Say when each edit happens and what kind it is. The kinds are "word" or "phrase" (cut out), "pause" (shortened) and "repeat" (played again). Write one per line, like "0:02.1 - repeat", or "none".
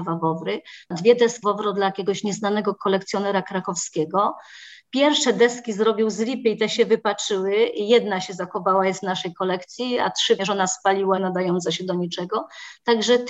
0:01.4 - word
0:10.4 - word
0:11.2 - phrase